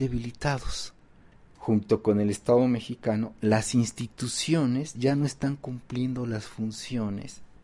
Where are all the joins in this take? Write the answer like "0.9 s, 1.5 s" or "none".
none